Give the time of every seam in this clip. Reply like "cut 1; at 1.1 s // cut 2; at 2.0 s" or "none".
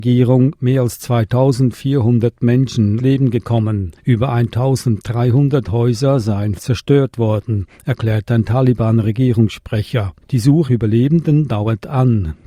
cut 1; at 3.0 s // cut 2; at 4.0 s // cut 3; at 6.6 s // cut 4; at 10.2 s // cut 5; at 10.7 s